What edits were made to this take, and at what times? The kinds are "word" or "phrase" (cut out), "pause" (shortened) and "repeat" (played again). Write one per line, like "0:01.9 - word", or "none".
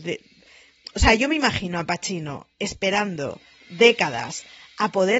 none